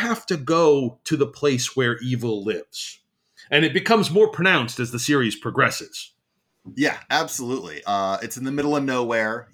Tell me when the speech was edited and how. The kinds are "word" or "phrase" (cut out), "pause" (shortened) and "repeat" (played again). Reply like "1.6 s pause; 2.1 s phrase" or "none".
none

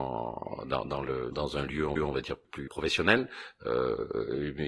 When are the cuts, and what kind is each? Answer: 1.3 s word; 2.0 s repeat; 2.7 s word

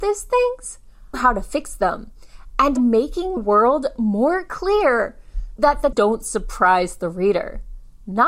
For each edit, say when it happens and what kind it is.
1.1 s phrase; 2.8 s phrase; 3.4 s word; 5.6 s word; 5.9 s word

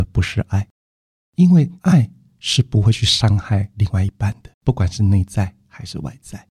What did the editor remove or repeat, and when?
1.8 s pause; 4.5 s pause

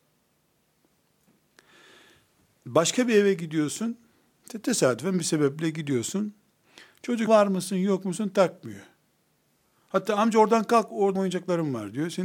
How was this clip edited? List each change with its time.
7.3 s word; 11.1 s word

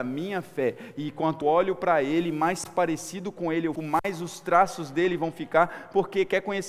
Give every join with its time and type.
1.4 s phrase; 3.8 s word

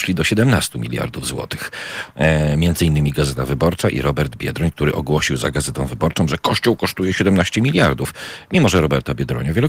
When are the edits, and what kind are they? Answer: none

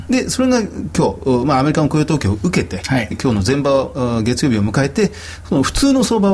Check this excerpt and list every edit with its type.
3.1 s word

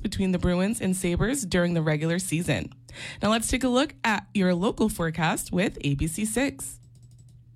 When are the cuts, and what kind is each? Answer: none

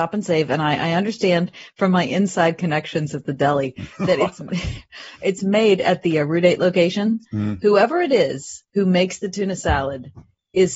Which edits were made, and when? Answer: 8.7 s pause

